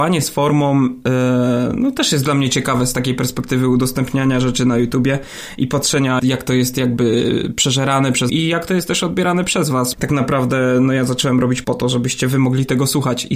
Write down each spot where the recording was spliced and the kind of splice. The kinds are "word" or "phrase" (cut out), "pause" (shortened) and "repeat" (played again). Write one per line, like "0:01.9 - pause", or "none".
0:06.2 - word
0:08.3 - word
0:09.9 - word
0:11.6 - word